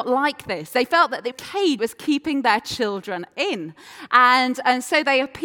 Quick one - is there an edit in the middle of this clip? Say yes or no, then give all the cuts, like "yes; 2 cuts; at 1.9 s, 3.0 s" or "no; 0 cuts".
yes; 2 cuts; at 1.3 s, 1.8 s